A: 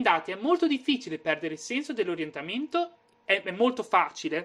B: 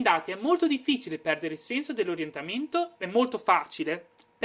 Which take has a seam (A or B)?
B